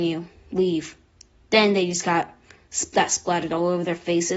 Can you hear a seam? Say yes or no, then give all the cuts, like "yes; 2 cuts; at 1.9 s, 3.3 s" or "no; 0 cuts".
no; 0 cuts